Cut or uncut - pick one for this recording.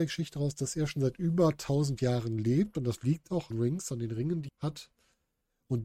cut